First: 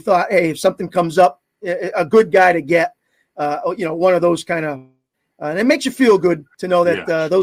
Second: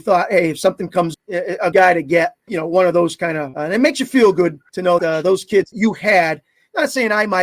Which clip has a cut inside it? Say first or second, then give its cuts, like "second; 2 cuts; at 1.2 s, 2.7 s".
second; 6 cuts; at 1.1 s, 1.7 s, 2.5 s, 3.5 s, 5.0 s, 5.7 s